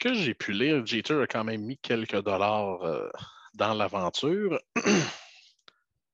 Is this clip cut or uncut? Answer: uncut